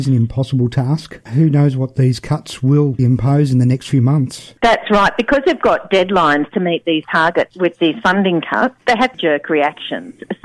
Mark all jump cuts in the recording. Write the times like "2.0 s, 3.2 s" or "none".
3.0 s, 9.1 s